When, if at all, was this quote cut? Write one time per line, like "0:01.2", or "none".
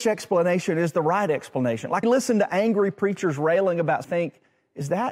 0:02.0
0:04.0